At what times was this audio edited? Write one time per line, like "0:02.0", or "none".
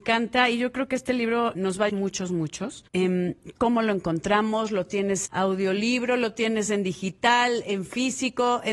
0:01.5
0:01.9
0:02.9
0:05.3